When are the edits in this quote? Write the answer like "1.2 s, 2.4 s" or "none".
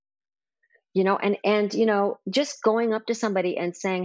none